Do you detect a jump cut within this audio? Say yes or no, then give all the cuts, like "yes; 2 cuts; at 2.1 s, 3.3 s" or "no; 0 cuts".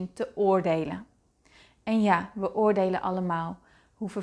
no; 0 cuts